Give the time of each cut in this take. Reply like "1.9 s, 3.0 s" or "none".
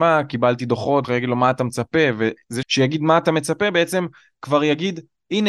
1.0 s, 2.6 s